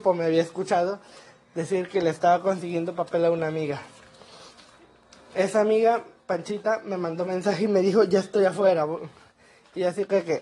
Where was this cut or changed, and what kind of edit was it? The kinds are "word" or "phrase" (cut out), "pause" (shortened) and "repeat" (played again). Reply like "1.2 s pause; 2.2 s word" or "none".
none